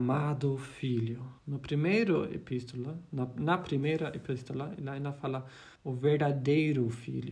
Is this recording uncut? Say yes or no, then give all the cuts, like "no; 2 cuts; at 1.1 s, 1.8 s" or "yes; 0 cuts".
no; 2 cuts; at 1.4 s, 5.8 s